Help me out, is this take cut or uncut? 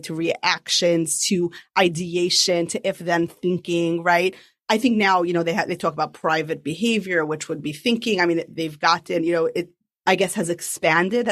uncut